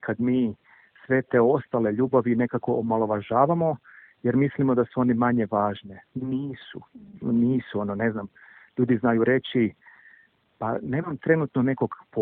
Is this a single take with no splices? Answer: yes; 0 cuts

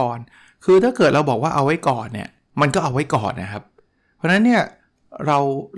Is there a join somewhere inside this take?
no; 0 cuts

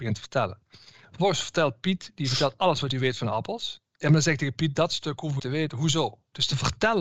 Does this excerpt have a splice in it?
yes; 1 cut; at 5.4 s

